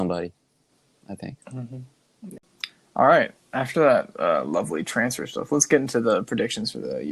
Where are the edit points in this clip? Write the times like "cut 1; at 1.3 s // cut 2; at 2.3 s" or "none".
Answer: cut 1; at 1.4 s